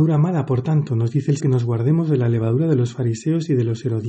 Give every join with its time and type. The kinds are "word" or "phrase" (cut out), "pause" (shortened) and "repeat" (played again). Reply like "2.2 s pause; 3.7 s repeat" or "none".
1.4 s word